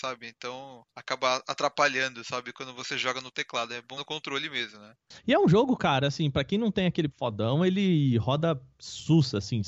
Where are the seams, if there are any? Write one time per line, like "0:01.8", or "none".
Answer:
0:00.9
0:04.0
0:07.1